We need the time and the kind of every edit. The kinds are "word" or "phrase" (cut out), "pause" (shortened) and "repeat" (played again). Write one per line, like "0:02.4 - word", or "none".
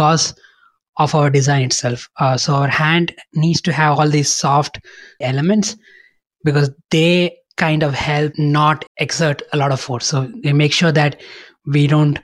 0:05.2 - word
0:08.9 - pause